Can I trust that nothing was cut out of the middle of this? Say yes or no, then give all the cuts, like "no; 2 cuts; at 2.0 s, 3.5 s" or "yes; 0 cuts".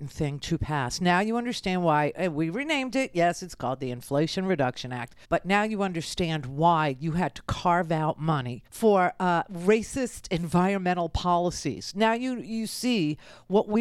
no; 2 cuts; at 5.2 s, 8.7 s